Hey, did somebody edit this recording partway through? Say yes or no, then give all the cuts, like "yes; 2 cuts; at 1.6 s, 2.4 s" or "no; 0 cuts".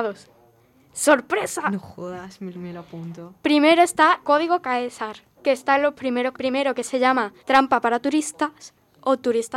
yes; 5 cuts; at 2.5 s, 4.2 s, 5.4 s, 6.3 s, 7.4 s